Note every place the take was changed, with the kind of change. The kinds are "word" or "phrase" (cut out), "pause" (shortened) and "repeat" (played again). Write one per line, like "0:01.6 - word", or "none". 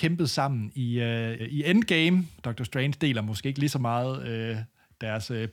0:01.4 - word
0:02.4 - pause